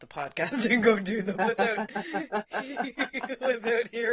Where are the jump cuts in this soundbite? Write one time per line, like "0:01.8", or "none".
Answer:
0:01.4